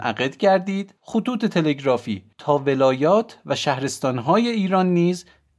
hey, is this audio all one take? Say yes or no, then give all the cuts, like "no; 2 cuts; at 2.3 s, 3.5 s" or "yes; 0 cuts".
no; 2 cuts; at 1.0 s, 2.3 s